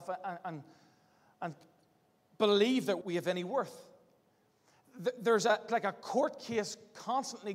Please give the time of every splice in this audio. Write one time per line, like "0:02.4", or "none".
0:03.0
0:05.7